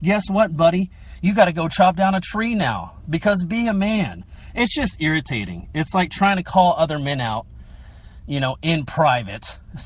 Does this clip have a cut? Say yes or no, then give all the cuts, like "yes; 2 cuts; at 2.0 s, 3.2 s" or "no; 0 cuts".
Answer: no; 0 cuts